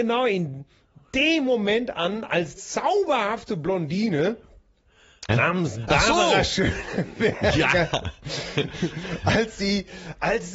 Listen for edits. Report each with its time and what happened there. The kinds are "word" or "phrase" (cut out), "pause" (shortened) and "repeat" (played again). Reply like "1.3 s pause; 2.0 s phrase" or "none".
2.6 s word; 5.3 s word